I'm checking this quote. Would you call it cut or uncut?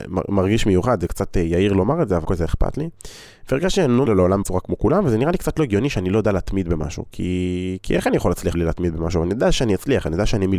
cut